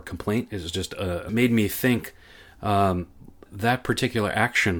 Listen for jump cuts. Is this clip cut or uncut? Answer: cut